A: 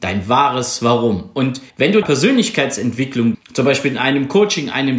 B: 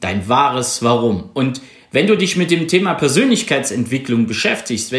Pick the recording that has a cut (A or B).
A